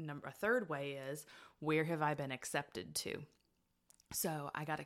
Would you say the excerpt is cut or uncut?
uncut